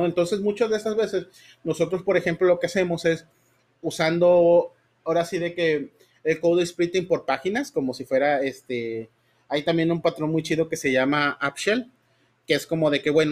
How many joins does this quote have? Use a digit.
0